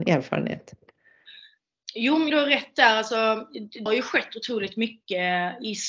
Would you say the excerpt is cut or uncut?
cut